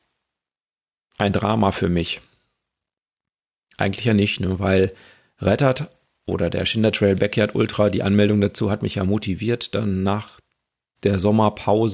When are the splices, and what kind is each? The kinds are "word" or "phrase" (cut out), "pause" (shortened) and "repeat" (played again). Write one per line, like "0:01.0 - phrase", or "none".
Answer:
none